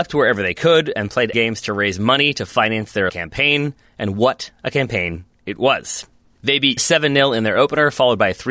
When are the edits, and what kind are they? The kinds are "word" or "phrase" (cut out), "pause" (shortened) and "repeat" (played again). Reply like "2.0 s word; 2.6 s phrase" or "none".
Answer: 1.3 s word; 3.1 s word; 6.8 s word